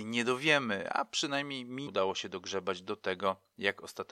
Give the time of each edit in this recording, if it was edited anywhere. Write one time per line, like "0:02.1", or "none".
0:01.9